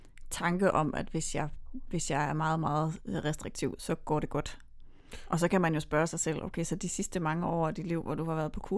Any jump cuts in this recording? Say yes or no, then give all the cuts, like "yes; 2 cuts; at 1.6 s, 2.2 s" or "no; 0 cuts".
no; 0 cuts